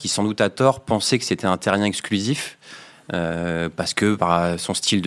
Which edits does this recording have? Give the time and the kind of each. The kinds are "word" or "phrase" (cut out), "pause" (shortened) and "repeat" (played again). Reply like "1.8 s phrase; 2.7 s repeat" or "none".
none